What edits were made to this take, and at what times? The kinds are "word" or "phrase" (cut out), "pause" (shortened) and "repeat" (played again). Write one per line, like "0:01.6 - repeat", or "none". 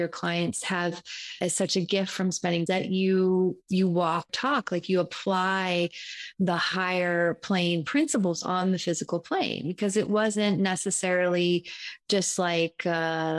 0:01.4 - word
0:02.7 - phrase
0:04.3 - word